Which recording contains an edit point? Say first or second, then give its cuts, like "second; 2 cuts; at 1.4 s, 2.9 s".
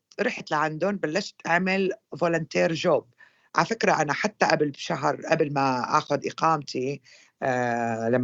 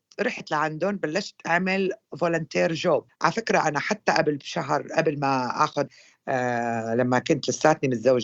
second; 2 cuts; at 3.1 s, 5.9 s